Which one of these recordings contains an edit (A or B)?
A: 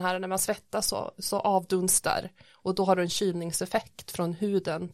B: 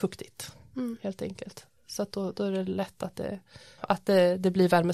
B